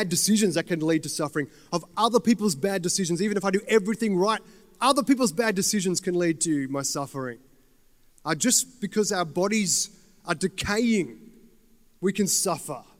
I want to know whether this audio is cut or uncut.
uncut